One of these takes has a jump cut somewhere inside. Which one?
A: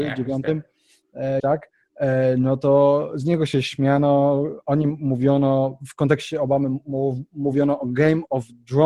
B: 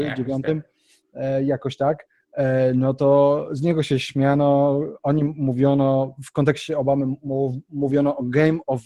A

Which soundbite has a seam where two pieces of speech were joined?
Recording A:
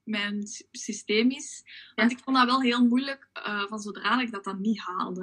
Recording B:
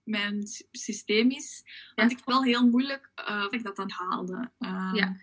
B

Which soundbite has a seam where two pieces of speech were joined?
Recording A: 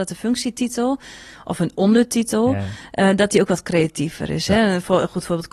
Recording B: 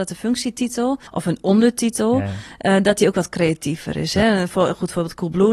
B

